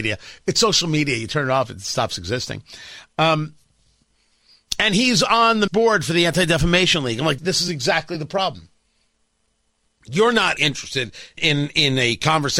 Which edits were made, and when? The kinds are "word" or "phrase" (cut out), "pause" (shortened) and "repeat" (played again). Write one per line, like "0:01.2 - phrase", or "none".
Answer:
0:05.7 - word
0:07.4 - word
0:10.6 - word
0:11.4 - word